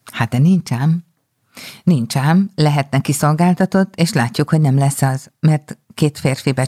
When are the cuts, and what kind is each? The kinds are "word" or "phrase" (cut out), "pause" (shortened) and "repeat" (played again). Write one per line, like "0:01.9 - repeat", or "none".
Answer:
none